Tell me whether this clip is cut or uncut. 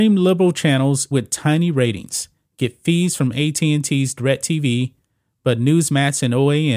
cut